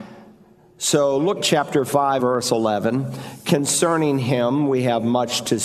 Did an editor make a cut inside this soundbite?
yes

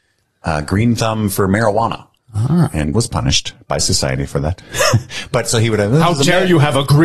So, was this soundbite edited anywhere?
yes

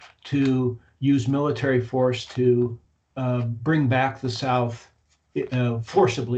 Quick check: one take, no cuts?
yes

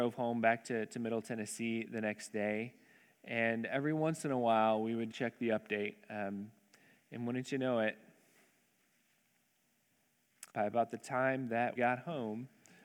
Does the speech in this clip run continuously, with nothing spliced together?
no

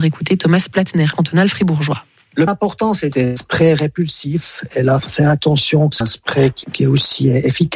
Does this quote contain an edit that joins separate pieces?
yes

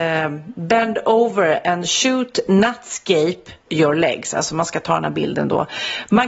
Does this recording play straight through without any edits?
no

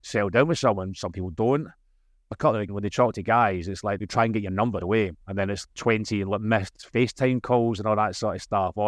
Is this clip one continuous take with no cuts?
no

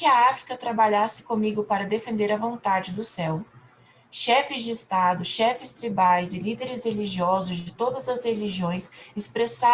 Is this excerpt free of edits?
yes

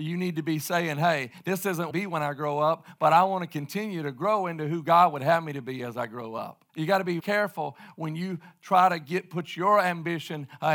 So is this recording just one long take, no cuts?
no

